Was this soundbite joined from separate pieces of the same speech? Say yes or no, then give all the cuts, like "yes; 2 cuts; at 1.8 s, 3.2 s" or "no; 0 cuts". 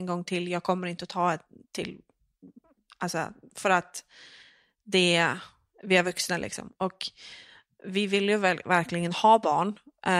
no; 0 cuts